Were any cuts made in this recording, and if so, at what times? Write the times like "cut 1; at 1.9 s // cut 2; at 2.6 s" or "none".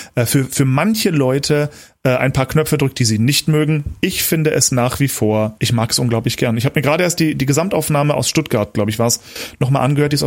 none